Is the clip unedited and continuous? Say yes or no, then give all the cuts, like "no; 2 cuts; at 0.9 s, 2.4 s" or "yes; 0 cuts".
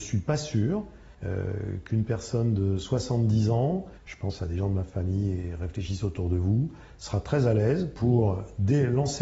no; 2 cuts; at 1.1 s, 4.0 s